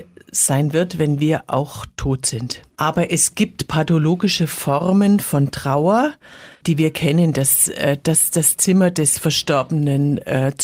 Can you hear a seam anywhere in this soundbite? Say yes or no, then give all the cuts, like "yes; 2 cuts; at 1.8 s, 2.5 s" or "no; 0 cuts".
yes; 1 cut; at 2.7 s